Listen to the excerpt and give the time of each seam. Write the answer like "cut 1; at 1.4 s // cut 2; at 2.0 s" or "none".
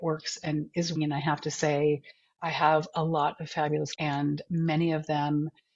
cut 1; at 1.0 s // cut 2; at 3.9 s